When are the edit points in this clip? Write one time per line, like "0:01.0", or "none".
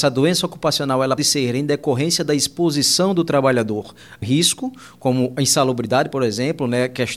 0:01.2
0:04.2